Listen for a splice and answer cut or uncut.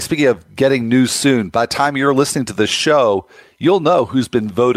uncut